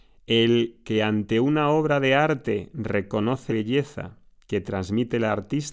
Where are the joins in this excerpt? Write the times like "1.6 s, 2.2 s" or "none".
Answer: 3.5 s